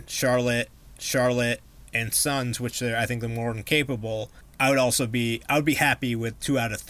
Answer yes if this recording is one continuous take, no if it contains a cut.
no